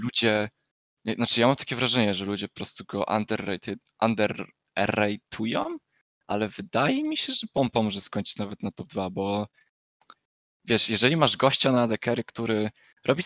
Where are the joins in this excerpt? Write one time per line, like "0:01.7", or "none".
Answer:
none